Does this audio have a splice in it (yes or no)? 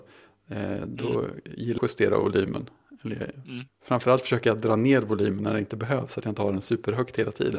yes